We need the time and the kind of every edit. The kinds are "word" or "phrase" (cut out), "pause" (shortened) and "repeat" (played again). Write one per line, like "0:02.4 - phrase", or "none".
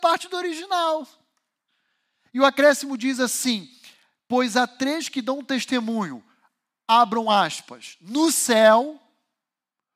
none